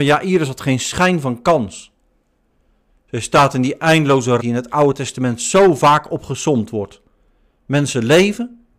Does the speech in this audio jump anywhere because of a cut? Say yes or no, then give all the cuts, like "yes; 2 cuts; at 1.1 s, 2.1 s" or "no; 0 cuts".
yes; 1 cut; at 4.4 s